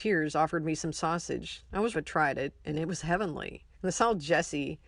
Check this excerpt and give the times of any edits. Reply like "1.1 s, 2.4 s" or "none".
1.9 s, 3.7 s